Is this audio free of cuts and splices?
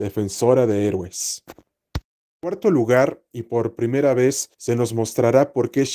no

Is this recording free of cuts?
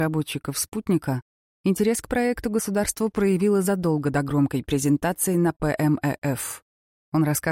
yes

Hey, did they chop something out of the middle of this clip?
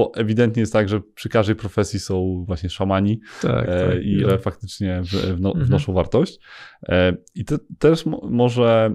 yes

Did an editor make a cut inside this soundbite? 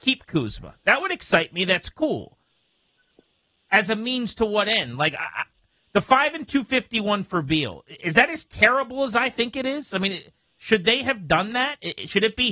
no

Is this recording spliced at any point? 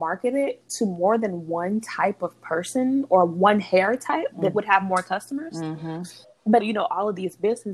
yes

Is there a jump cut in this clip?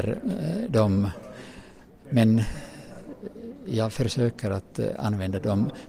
no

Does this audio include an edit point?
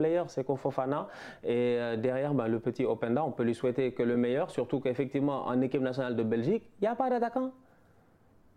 no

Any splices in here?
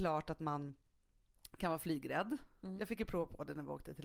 no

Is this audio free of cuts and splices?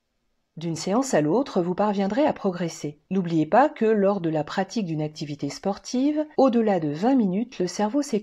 no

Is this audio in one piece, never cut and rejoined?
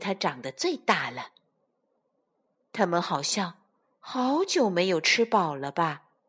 yes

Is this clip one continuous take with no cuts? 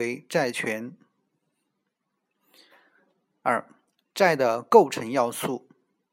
yes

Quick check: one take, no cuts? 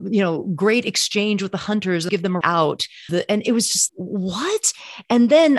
no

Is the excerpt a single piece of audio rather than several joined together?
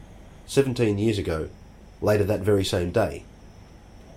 yes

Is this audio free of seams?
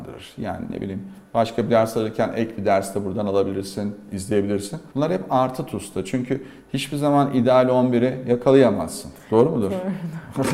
no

